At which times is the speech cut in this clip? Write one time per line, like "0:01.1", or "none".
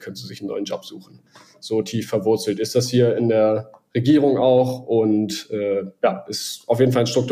none